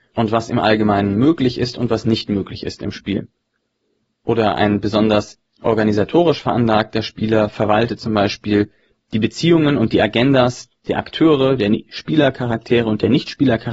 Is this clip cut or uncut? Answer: uncut